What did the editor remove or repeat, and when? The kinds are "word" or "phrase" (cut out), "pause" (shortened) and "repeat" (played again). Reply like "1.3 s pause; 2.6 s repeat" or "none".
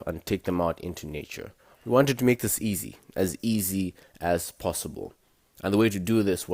none